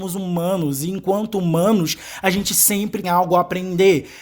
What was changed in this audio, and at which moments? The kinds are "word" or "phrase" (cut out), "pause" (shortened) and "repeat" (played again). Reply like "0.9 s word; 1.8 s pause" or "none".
3.0 s word